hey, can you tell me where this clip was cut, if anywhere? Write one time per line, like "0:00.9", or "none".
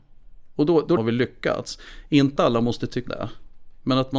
0:01.0
0:02.4
0:03.1

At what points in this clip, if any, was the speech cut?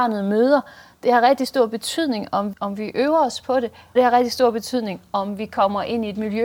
0:02.5
0:04.0

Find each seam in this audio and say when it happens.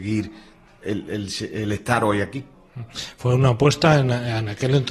none

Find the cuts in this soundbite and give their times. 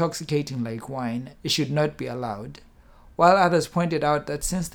0:01.4

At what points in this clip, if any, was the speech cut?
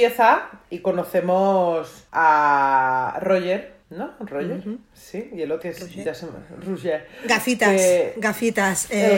0:02.1
0:03.8
0:05.6

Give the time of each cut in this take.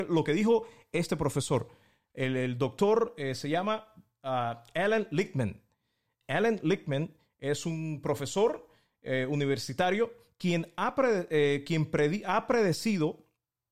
none

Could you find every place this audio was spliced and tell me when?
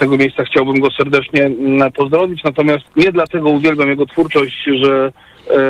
0:02.9

